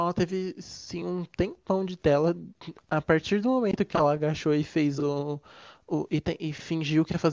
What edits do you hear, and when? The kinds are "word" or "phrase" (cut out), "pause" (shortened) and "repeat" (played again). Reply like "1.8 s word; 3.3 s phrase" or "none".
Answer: none